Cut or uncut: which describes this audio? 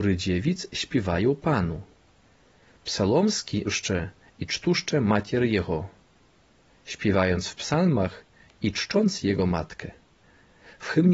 cut